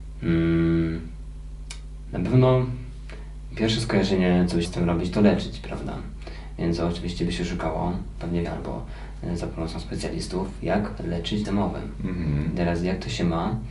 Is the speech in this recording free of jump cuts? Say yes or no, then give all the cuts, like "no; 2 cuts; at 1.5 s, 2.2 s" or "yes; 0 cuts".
no; 3 cuts; at 4.6 s, 8.4 s, 11.4 s